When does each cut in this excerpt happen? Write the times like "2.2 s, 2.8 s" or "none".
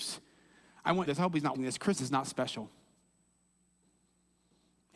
1.1 s, 1.5 s, 2.0 s